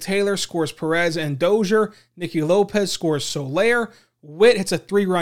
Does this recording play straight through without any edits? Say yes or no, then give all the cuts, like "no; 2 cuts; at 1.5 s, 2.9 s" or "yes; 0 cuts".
yes; 0 cuts